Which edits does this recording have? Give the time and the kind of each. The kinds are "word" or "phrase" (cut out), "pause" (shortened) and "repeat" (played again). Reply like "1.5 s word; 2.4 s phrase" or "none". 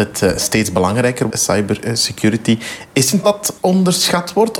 1.3 s word; 3.2 s word; 3.6 s pause

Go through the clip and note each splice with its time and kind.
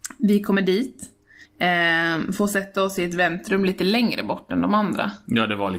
1.4 s pause

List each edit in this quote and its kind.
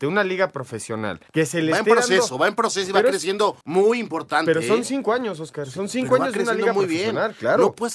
1.3 s pause; 3.6 s pause

